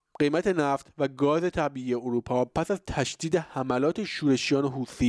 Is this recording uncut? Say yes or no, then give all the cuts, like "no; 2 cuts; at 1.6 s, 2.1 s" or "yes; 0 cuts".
yes; 0 cuts